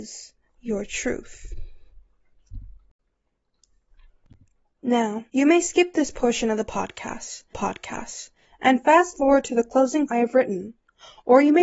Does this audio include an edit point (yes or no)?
yes